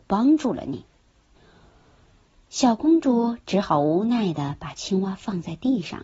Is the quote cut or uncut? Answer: uncut